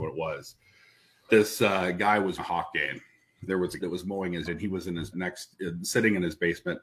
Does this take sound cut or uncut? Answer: cut